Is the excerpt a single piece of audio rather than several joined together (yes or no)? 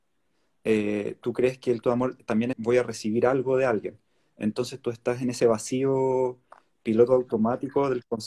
no